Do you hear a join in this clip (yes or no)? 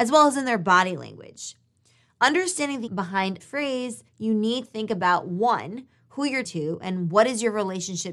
yes